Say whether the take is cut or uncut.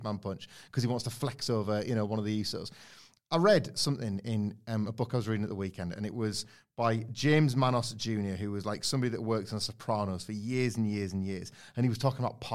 uncut